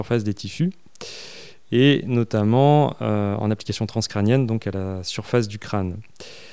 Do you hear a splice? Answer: no; 0 cuts

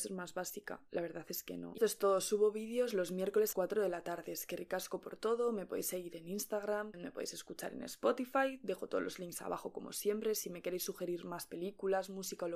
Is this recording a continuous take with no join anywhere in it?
no; 3 cuts; at 1.8 s, 3.5 s, 6.9 s

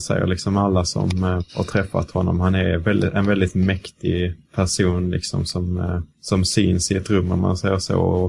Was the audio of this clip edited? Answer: yes; 3 cuts; at 1.5 s, 4.4 s, 6.1 s

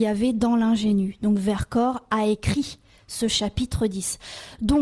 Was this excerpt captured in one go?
yes; 0 cuts

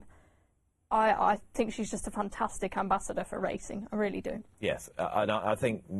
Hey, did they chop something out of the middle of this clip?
no; 0 cuts

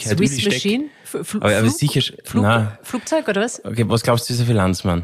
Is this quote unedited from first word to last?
yes; 0 cuts

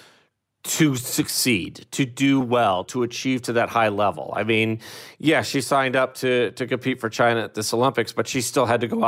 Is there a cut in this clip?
no; 0 cuts

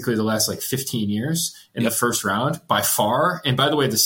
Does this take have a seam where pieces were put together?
no; 0 cuts

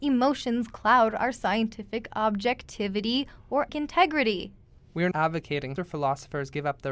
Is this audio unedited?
no; 3 cuts; at 3.7 s, 5.1 s, 5.8 s

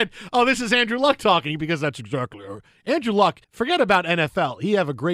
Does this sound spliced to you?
yes; 1 cut; at 3.4 s

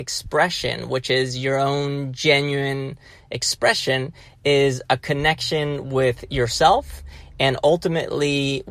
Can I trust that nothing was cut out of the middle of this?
yes; 0 cuts

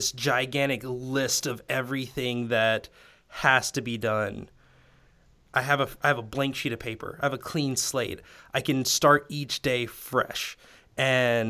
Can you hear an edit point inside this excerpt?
no; 0 cuts

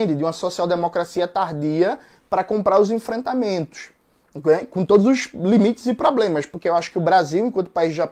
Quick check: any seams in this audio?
no; 0 cuts

